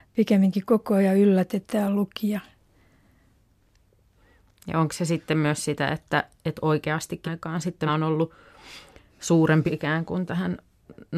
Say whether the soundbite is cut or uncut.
cut